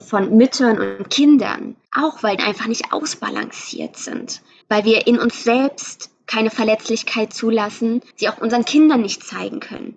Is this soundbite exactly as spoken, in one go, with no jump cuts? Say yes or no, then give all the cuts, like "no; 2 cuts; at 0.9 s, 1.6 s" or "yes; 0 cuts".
no; 4 cuts; at 1.8 s, 2.4 s, 4.6 s, 8.1 s